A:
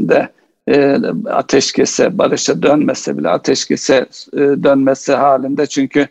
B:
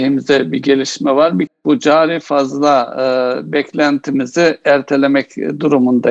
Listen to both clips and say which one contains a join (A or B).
B